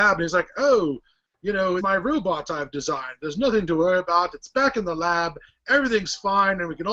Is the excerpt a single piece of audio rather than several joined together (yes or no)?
no